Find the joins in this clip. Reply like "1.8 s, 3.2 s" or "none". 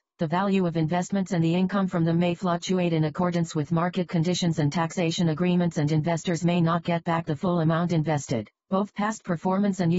none